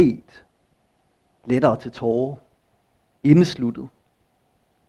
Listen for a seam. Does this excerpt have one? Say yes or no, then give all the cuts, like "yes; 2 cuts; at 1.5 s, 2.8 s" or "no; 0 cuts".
no; 0 cuts